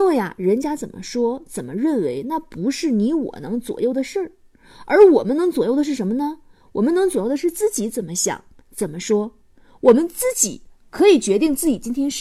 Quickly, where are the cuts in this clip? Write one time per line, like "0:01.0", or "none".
none